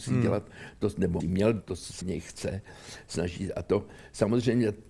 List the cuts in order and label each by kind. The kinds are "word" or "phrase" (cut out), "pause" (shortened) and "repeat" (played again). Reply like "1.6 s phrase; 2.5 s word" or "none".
1.2 s word; 1.6 s word; 2.0 s word